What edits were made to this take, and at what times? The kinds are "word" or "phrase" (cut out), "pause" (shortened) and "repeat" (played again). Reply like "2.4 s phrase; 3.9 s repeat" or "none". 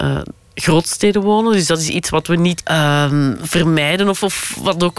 2.6 s word